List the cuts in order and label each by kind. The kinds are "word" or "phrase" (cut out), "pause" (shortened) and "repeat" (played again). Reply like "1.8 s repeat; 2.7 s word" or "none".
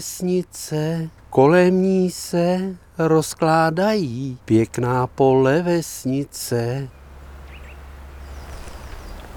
1.2 s pause; 4.4 s pause